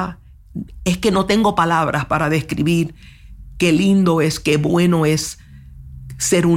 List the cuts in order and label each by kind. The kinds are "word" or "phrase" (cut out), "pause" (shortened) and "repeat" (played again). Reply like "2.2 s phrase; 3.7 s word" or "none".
none